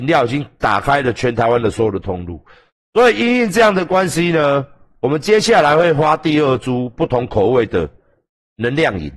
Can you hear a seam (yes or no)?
no